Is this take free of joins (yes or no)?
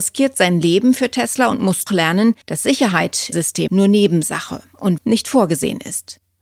no